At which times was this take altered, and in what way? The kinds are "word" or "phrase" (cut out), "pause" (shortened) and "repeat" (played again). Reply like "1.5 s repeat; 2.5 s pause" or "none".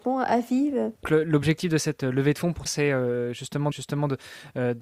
1.0 s word; 2.7 s word; 3.7 s repeat